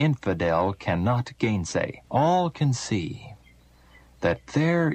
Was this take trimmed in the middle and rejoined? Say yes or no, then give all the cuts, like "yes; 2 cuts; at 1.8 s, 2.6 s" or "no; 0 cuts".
yes; 1 cut; at 2.0 s